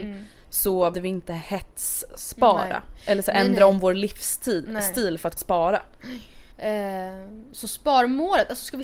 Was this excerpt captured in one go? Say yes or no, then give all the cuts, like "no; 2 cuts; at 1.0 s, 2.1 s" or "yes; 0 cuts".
no; 3 cuts; at 0.9 s, 5.4 s, 6.5 s